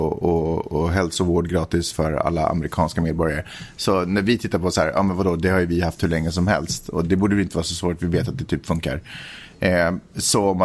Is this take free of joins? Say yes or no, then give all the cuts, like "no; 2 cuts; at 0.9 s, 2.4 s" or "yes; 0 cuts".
yes; 0 cuts